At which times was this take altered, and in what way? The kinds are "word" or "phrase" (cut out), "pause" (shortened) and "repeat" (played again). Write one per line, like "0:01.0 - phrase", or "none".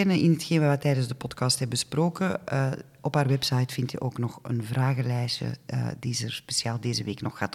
none